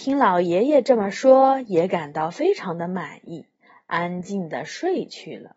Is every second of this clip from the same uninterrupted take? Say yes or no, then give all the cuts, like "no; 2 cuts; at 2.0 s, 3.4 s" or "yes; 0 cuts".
yes; 0 cuts